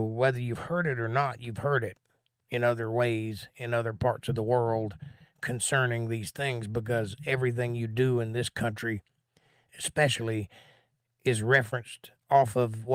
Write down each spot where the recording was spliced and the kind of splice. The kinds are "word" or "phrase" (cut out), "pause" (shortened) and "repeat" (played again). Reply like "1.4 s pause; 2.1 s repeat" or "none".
none

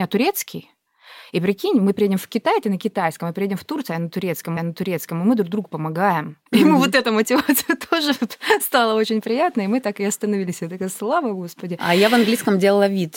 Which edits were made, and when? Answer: 4.6 s repeat; 6.5 s pause

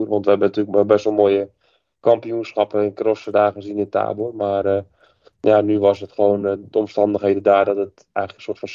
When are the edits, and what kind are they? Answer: none

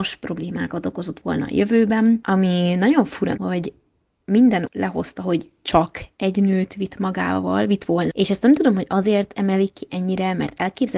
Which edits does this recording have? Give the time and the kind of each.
3.4 s word; 4.7 s word; 8.1 s word

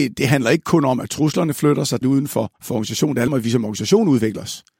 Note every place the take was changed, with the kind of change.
2.0 s phrase; 2.6 s pause; 3.3 s word

